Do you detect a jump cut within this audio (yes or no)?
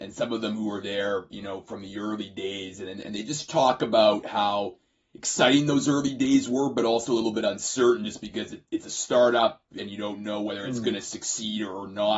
no